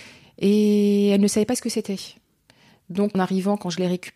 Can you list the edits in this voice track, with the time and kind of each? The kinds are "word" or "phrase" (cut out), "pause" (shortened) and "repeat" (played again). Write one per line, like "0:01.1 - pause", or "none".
0:03.1 - word